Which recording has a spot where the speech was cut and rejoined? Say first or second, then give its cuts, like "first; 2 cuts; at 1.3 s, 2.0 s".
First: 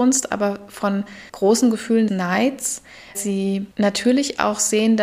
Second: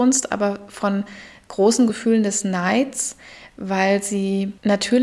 first; 3 cuts; at 1.3 s, 2.1 s, 3.1 s